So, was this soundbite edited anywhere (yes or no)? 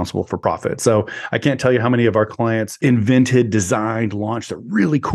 no